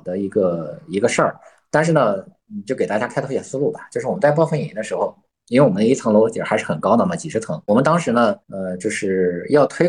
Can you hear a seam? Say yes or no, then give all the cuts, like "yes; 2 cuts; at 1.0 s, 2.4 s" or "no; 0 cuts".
yes; 1 cut; at 8.4 s